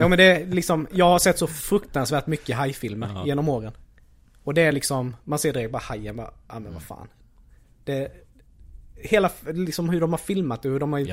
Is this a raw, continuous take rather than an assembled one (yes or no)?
yes